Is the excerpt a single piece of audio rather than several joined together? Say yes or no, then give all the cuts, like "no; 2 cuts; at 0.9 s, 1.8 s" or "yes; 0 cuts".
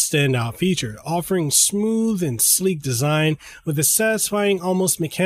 yes; 0 cuts